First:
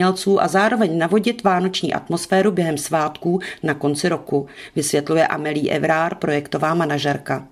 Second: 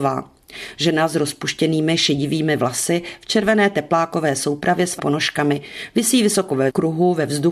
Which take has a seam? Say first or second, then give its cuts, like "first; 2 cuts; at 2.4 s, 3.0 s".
second; 1 cut; at 5.0 s